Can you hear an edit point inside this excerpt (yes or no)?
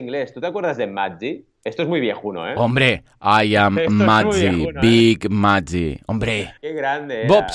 yes